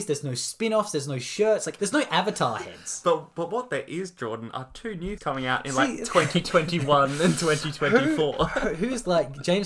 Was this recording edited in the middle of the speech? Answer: yes; 2 cuts; at 1.8 s, 5.2 s

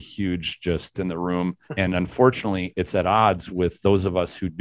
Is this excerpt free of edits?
no; 2 cuts; at 0.9 s, 1.6 s

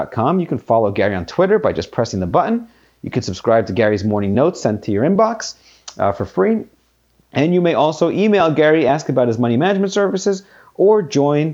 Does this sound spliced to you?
no; 0 cuts

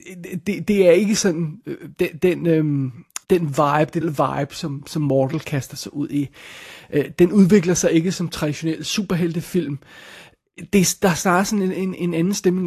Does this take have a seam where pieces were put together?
yes; 2 cuts; at 3.2 s, 4.0 s

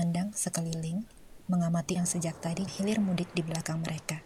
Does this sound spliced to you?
yes; 2 cuts; at 2.0 s, 2.7 s

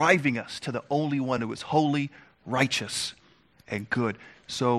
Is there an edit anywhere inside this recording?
no; 0 cuts

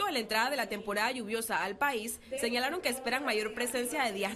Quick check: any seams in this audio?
no; 0 cuts

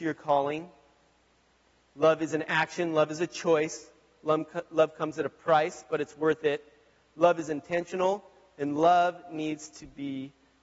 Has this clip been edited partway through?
no; 0 cuts

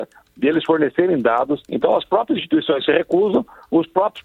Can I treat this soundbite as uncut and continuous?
no; 1 cut; at 1.6 s

